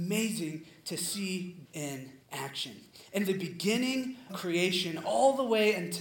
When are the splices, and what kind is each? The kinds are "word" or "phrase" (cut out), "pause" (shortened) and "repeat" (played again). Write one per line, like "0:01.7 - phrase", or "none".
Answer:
0:01.6 - word
0:02.2 - pause
0:03.3 - word
0:04.3 - word

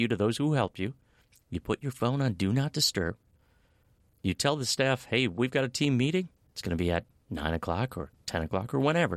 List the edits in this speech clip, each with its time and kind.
none

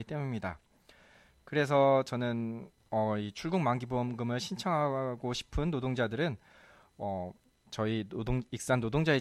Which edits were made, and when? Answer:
none

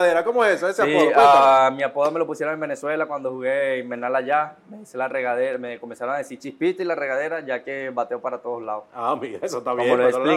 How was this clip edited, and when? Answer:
none

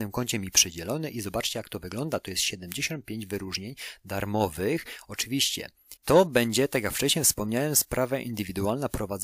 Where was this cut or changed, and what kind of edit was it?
0:06.0 - pause

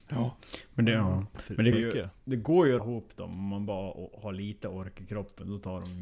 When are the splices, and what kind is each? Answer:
0:01.7 - word
0:02.8 - word

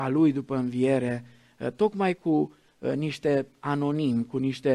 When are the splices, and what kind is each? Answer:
none

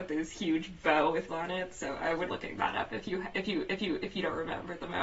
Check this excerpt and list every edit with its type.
0:01.3 - word
0:02.3 - word
0:03.7 - repeat

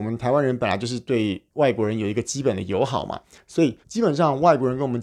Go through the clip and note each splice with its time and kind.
0:01.5 - pause
0:03.8 - pause

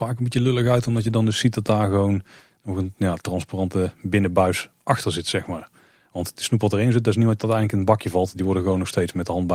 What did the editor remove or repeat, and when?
none

